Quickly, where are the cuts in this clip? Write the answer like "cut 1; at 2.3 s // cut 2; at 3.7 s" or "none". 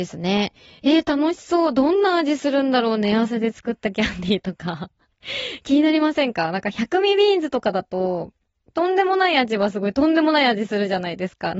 none